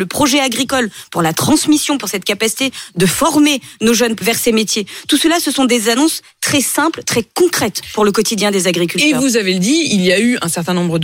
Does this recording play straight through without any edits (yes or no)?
no